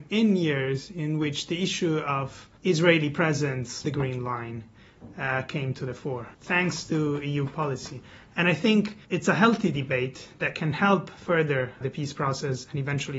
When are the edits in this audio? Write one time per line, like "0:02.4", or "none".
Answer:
0:02.6
0:03.8
0:06.3
0:09.0
0:11.8